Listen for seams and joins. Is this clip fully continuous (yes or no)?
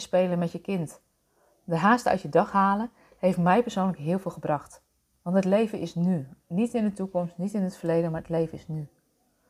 yes